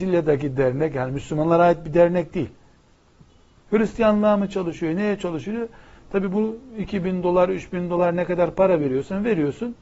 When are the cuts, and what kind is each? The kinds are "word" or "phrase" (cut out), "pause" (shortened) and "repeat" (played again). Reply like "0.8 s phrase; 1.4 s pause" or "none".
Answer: none